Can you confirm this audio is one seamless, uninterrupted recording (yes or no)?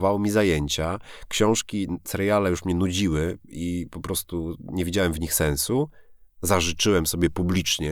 yes